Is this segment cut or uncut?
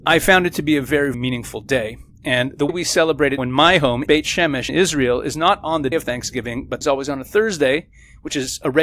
cut